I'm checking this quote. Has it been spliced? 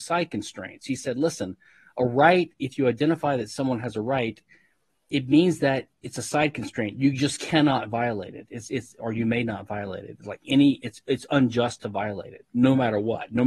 no; 0 cuts

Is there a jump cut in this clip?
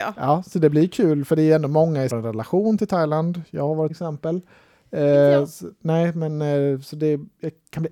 yes; 2 cuts; at 2.1 s, 3.9 s

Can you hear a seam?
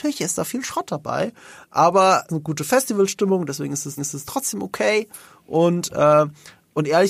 yes; 2 cuts; at 2.3 s, 4.0 s

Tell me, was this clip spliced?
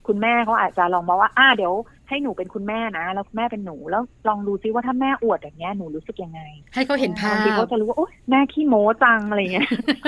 yes; 2 cuts; at 6.6 s, 8.2 s

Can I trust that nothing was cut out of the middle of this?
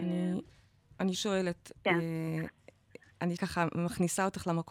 no; 2 cuts; at 1.1 s, 3.4 s

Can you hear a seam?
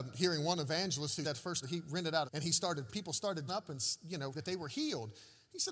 yes; 6 cuts; at 1.2 s, 1.6 s, 2.3 s, 2.9 s, 3.5 s, 4.3 s

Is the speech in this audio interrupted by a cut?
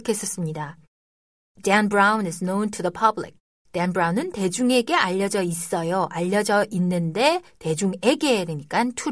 no; 0 cuts

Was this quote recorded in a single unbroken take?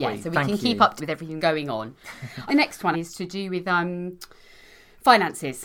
no; 4 cuts; at 1.0 s, 1.4 s, 2.5 s, 2.9 s

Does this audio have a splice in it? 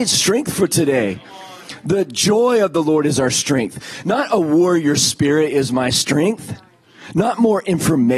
no; 0 cuts

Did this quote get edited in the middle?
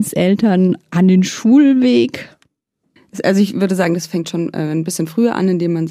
no; 0 cuts

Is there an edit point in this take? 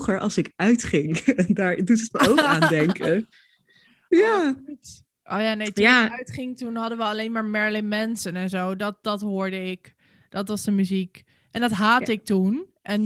no; 0 cuts

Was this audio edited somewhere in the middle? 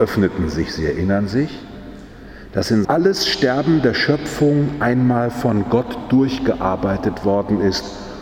yes; 1 cut; at 2.8 s

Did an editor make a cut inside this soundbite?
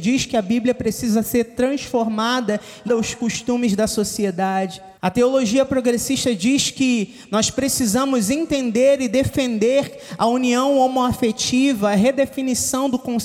yes; 2 cuts; at 2.9 s, 5.0 s

